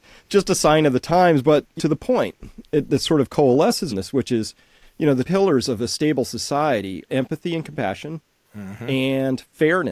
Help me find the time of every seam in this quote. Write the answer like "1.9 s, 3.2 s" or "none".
1.4 s, 1.8 s, 2.9 s, 3.9 s, 5.2 s, 7.1 s

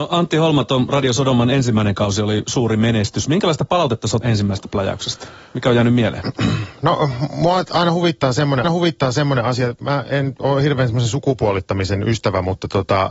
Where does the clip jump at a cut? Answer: 4.2 s, 8.6 s

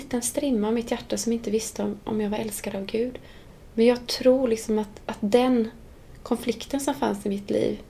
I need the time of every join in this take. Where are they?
none

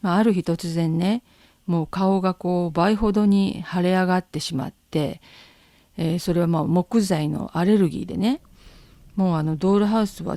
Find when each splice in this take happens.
none

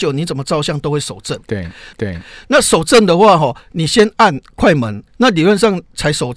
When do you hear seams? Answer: 1.9 s, 5.1 s

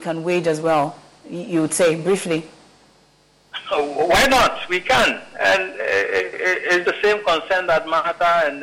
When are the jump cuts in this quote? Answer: 6.8 s

